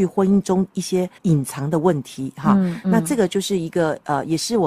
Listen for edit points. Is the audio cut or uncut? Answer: cut